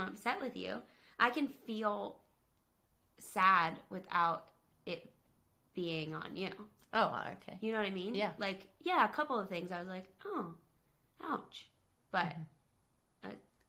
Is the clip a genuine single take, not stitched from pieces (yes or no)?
yes